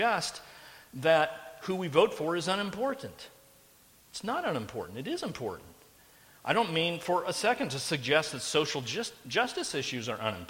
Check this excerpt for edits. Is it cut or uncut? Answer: uncut